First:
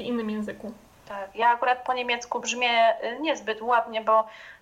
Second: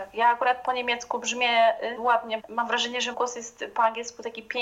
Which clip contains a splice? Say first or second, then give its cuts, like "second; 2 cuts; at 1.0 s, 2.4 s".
second; 3 cuts; at 2.0 s, 2.4 s, 3.1 s